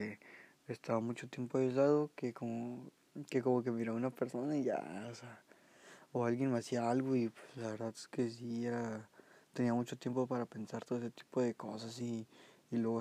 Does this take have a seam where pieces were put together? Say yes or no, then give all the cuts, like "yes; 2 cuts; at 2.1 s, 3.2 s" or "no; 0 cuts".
no; 0 cuts